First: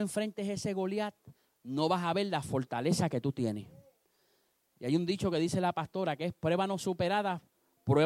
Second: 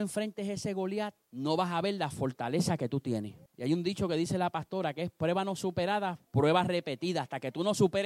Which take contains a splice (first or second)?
second